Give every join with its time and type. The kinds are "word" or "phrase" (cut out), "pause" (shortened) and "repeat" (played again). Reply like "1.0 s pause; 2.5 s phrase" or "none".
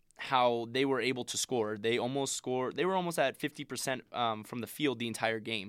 none